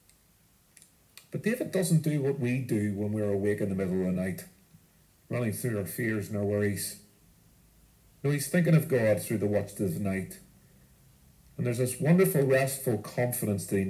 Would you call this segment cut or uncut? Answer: uncut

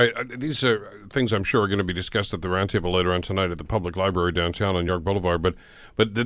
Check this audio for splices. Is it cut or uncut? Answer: uncut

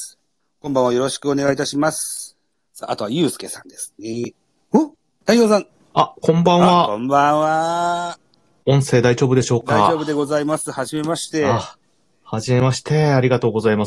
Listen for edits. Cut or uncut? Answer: uncut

